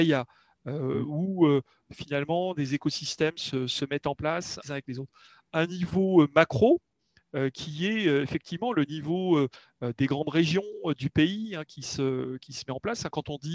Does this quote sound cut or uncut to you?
cut